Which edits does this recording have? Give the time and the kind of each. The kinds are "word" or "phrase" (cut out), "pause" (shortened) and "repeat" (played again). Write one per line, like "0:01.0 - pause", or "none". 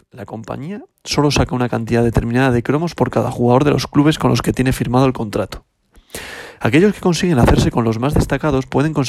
none